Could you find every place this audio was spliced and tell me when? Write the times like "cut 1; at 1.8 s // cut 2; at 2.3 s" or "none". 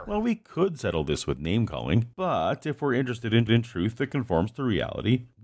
cut 1; at 2.1 s // cut 2; at 3.5 s